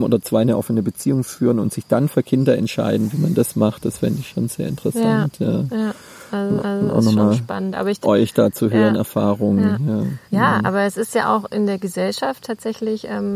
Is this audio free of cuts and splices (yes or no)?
no